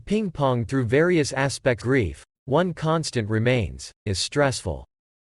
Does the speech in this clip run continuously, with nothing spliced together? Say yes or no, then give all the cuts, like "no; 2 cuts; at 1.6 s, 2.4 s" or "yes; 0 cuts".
no; 2 cuts; at 1.8 s, 4.1 s